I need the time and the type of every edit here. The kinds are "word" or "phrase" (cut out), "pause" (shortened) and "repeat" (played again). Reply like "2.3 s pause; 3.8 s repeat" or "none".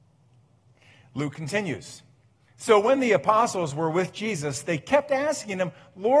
none